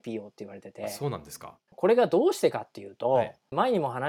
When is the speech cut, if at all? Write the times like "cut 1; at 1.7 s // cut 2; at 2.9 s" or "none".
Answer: cut 1; at 1.6 s